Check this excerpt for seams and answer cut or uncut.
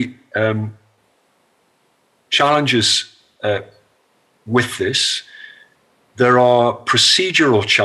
uncut